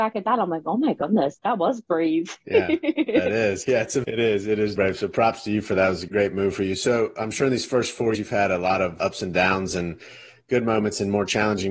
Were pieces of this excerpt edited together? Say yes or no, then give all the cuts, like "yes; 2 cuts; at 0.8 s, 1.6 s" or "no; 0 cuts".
yes; 7 cuts; at 1.4 s, 3.6 s, 4.0 s, 4.8 s, 6.1 s, 8.1 s, 9.0 s